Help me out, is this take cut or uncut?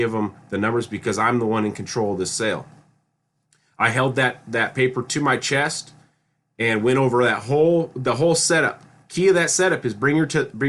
uncut